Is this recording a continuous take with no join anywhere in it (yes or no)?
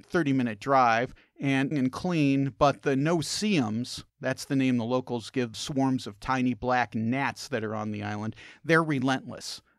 no